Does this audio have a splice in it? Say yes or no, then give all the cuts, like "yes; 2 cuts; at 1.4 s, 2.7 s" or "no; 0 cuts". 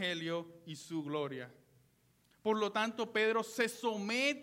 no; 0 cuts